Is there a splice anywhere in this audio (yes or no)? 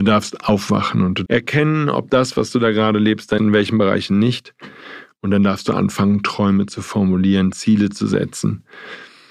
yes